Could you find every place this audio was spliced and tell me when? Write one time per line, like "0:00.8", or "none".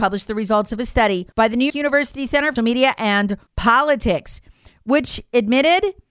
0:01.3
0:01.7
0:02.6
0:03.5